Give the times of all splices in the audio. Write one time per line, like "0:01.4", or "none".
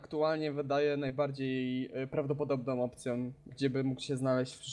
0:03.5

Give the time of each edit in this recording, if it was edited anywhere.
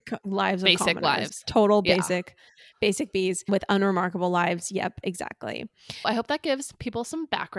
0:06.0

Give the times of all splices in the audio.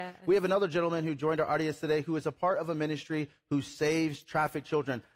none

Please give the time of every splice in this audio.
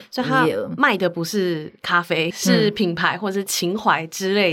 0:02.3

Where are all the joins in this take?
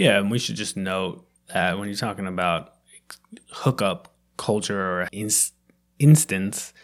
0:01.4
0:05.1

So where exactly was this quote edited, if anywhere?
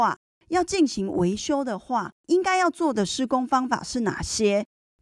0:02.2

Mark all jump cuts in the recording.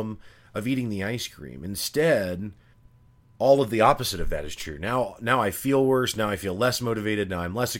0:02.7

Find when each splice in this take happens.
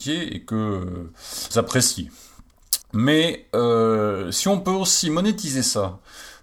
0:01.5
0:02.8

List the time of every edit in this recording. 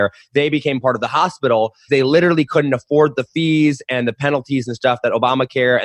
0:01.9

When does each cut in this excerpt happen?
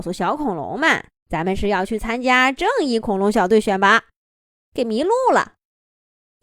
0:01.2

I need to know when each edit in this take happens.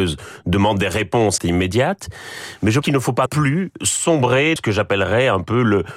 0:01.4
0:02.8
0:03.3
0:04.6

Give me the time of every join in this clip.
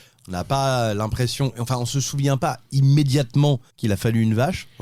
0:03.7

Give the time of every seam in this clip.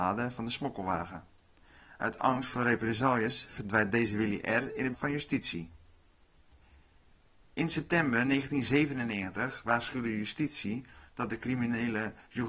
0:04.9

